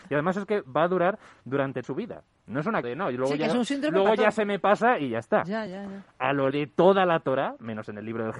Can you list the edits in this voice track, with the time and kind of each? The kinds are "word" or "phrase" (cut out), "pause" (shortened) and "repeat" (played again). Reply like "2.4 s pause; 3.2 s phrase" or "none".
1.8 s word; 2.8 s word; 5.7 s word; 6.5 s word